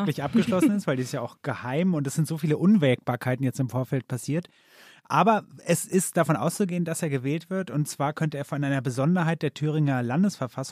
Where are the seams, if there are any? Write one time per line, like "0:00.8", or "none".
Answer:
none